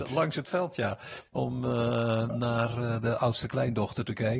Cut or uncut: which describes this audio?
cut